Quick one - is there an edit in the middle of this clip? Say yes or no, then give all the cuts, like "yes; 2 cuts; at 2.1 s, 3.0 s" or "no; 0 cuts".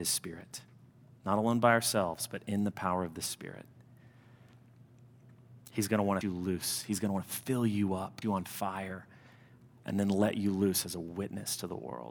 yes; 2 cuts; at 6.2 s, 8.2 s